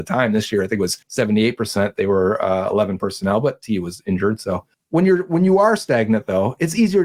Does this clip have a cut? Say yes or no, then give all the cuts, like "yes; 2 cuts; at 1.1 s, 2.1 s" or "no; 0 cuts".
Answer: yes; 2 cuts; at 1.0 s, 4.7 s